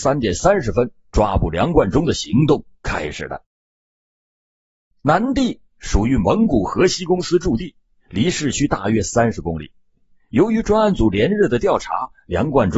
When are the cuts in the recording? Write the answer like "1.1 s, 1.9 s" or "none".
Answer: none